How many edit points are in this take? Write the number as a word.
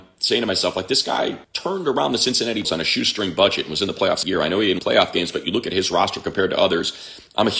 four